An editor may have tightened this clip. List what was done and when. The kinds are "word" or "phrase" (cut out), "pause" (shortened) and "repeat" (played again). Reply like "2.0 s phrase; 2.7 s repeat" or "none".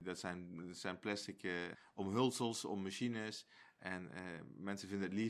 none